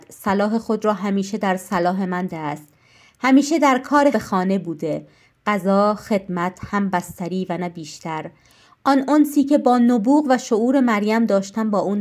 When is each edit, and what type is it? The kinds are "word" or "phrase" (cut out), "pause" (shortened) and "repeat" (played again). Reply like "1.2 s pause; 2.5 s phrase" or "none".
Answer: 2.3 s word; 4.1 s word

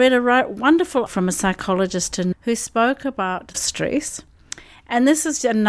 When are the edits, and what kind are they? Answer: 1.1 s word; 2.3 s word; 3.5 s phrase

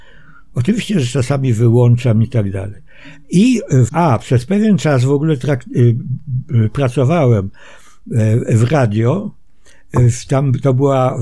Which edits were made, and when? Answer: 3.9 s word

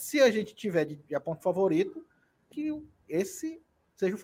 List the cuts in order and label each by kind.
1.4 s word; 2.5 s phrase

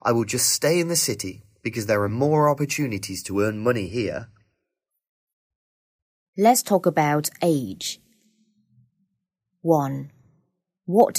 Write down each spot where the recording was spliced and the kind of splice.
none

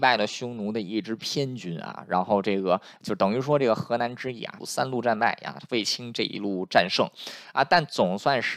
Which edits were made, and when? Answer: 4.6 s phrase

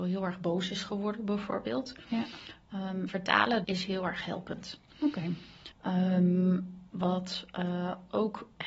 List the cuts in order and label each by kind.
3.1 s phrase; 3.6 s word; 5.7 s pause; 6.9 s pause

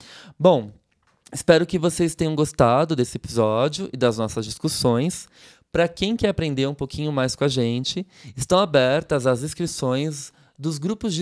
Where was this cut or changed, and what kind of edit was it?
none

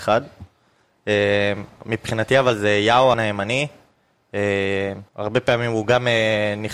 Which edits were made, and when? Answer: 3.1 s word; 5.1 s pause

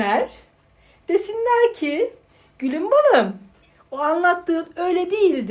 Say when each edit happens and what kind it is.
none

